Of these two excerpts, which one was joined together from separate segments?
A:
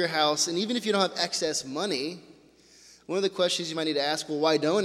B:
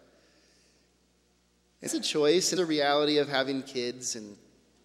B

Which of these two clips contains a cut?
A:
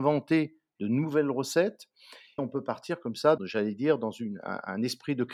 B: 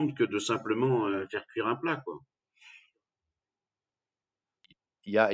A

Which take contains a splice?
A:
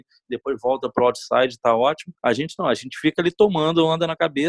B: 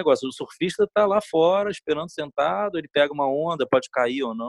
A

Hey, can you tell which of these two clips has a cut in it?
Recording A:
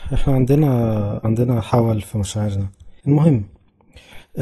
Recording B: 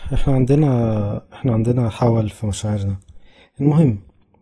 A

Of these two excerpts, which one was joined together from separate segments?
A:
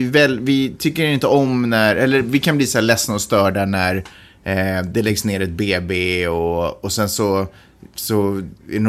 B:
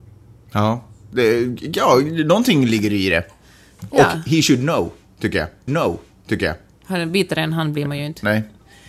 B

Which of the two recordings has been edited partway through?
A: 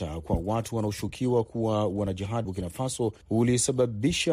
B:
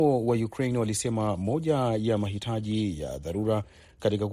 A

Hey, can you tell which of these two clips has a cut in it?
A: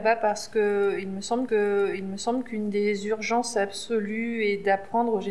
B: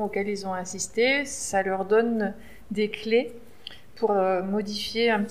A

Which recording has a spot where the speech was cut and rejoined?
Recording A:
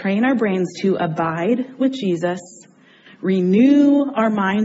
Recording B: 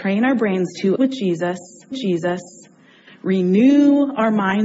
B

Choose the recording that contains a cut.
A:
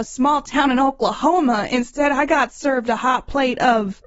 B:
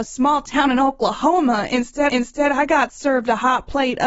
B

